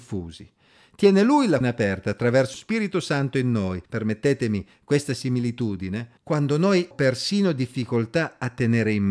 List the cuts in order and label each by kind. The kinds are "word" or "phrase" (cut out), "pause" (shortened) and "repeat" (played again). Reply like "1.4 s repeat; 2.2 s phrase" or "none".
1.6 s word; 2.5 s word; 3.9 s pause; 6.2 s pause; 6.9 s word